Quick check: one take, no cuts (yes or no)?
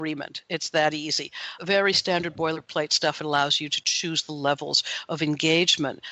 no